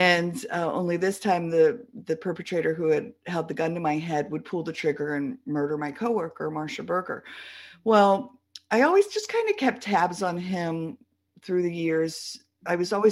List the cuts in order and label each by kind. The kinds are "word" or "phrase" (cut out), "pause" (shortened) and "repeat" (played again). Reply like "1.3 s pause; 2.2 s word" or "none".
none

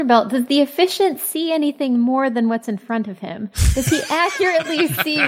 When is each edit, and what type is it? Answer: none

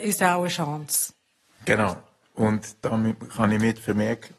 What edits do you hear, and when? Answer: none

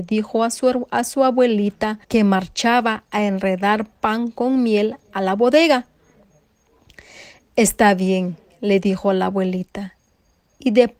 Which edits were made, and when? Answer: 2.0 s pause

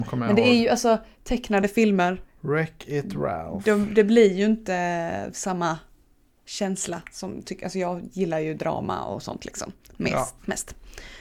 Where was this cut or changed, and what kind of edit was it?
none

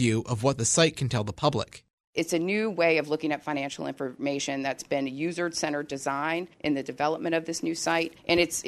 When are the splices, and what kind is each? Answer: none

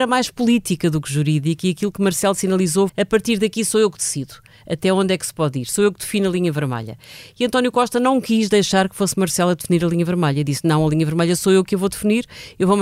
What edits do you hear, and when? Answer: 2.9 s word

